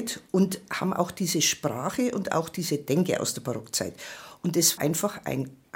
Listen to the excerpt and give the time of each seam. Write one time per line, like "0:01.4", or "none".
0:04.8